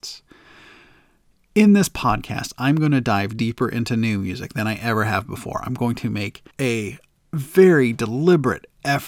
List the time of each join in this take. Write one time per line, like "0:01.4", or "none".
0:06.5

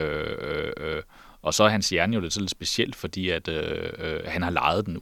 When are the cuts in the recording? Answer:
none

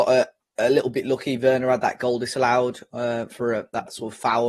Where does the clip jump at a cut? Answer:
none

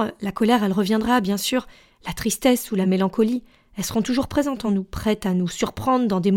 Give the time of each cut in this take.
none

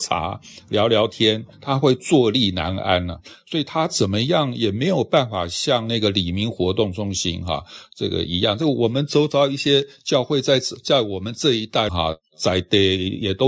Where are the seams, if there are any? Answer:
0:01.5
0:11.9

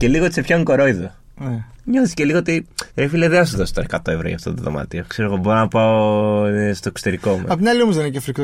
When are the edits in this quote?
0:02.9

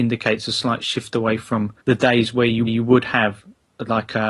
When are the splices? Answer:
0:01.8
0:02.7

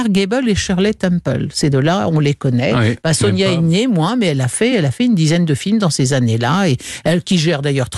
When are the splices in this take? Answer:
none

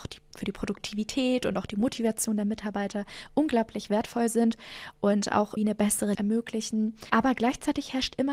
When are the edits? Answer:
0:05.6
0:06.1

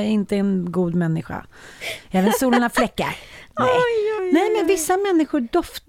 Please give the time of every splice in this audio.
0:04.2

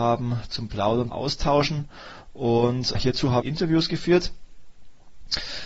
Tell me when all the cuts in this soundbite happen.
0:01.1
0:02.9
0:03.4

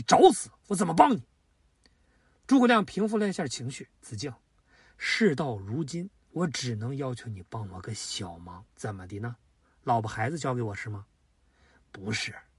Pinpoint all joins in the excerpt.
0:03.9
0:08.7

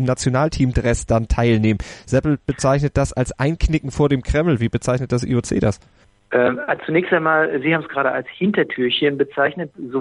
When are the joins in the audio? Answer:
none

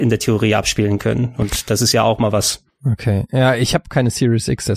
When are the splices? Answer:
none

